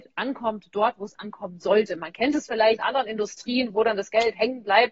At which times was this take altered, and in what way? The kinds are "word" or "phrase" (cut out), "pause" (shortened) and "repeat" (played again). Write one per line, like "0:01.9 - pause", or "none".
0:02.8 - phrase